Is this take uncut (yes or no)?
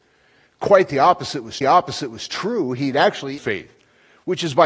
no